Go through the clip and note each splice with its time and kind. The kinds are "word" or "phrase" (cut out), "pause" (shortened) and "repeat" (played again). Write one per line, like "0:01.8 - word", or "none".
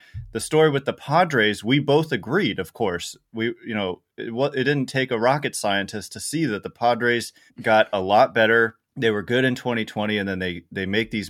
0:07.5 - pause
0:08.9 - pause